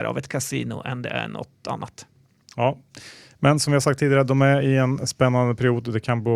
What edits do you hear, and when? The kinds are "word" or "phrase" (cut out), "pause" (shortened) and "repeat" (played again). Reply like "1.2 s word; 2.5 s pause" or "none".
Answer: none